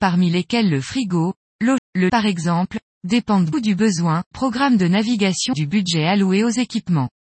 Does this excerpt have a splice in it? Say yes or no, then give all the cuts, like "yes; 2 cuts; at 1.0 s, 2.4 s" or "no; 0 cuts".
yes; 5 cuts; at 1.8 s, 2.1 s, 3.5 s, 4.3 s, 5.5 s